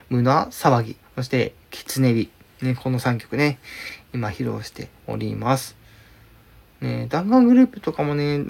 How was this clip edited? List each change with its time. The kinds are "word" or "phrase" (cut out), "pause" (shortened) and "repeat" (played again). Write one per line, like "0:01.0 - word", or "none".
0:01.0 - pause
0:02.5 - pause
0:05.0 - pause